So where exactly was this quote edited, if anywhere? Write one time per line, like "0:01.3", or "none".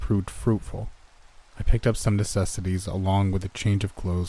0:01.5